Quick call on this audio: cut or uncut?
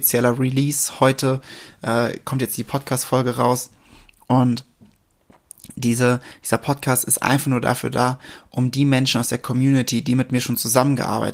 uncut